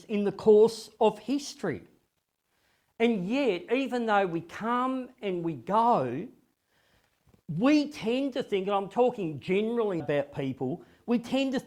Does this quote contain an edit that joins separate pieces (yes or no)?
yes